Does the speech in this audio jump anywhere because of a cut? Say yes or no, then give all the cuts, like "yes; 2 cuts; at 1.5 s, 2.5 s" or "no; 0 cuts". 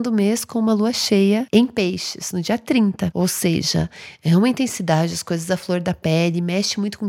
no; 0 cuts